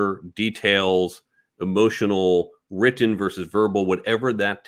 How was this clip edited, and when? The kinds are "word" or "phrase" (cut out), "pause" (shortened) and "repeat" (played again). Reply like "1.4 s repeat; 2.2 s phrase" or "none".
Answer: none